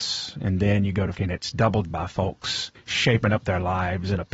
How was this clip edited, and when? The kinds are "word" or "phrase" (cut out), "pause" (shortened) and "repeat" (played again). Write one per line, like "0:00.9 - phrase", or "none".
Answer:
0:01.1 - word
0:01.9 - word
0:02.7 - pause